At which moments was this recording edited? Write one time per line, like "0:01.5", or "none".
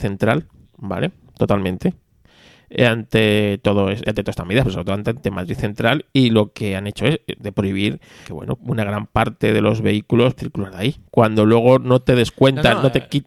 0:04.0
0:05.2
0:07.4
0:08.2
0:08.6
0:10.4